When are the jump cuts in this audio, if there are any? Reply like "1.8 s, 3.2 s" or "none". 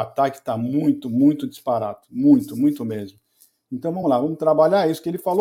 none